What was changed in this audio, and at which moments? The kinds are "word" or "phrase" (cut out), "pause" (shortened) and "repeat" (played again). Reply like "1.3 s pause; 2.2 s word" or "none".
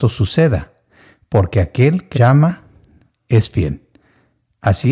2.1 s word